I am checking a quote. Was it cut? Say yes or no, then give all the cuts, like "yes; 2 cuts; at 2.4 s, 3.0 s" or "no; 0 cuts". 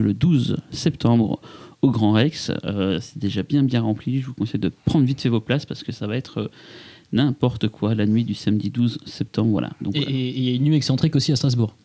no; 0 cuts